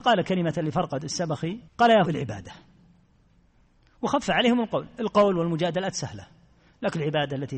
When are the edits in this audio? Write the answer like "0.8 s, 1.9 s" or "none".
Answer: 1.7 s, 2.0 s